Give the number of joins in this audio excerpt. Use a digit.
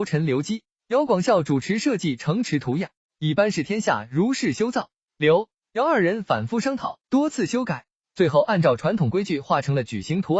1